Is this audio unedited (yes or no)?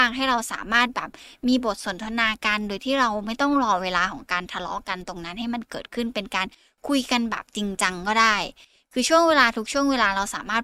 yes